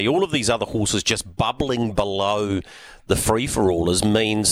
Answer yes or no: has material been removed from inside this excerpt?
no